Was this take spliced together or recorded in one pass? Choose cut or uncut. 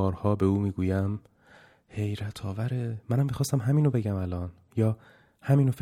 uncut